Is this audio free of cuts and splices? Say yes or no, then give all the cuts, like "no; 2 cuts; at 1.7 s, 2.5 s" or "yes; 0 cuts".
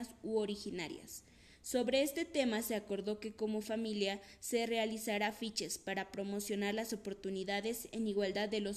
yes; 0 cuts